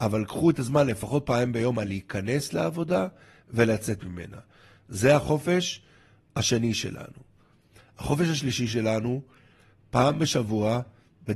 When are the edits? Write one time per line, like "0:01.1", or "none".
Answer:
none